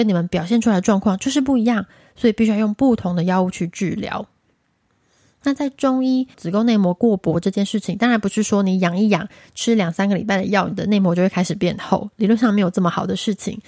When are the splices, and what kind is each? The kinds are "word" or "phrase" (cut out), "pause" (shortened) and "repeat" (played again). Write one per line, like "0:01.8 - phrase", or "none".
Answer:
0:06.3 - word